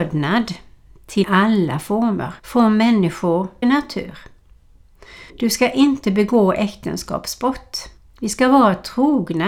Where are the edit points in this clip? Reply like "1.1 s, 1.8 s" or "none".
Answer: 1.2 s, 2.4 s, 3.6 s, 5.3 s, 8.0 s

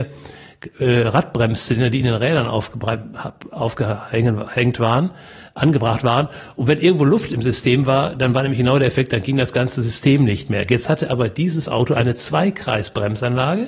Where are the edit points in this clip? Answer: none

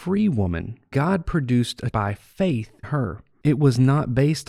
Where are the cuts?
0.9 s, 1.9 s, 2.8 s

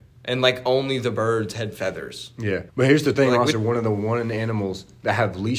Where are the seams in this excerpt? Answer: 2.7 s, 3.5 s

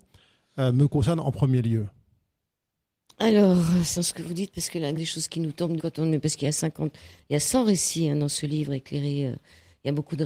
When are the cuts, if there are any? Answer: 4.0 s, 5.0 s, 5.8 s

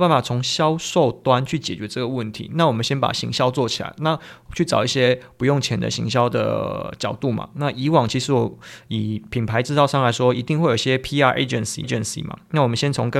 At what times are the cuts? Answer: 11.8 s

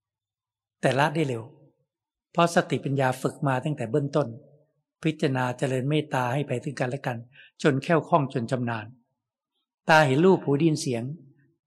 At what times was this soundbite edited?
none

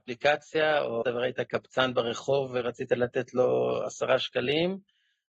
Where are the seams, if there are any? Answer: 1.0 s

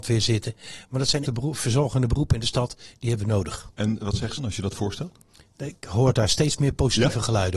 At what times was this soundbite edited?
1.3 s, 4.4 s

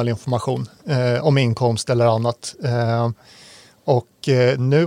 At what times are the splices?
none

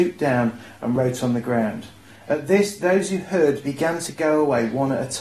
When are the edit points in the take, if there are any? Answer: none

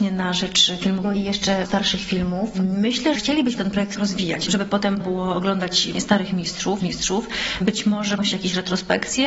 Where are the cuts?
1.0 s, 1.6 s, 3.1 s, 3.6 s, 4.0 s, 5.0 s, 5.9 s, 6.8 s, 8.2 s

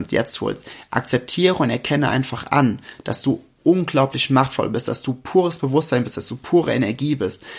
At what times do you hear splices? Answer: none

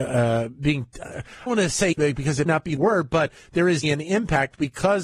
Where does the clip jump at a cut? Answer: 1.5 s, 1.9 s, 2.5 s, 2.8 s, 3.8 s

